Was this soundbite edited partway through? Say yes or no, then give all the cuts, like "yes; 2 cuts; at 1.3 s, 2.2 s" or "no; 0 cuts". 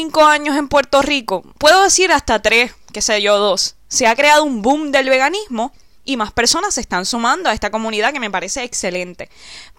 no; 0 cuts